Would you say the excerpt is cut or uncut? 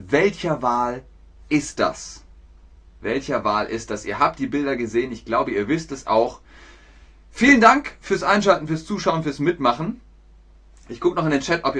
uncut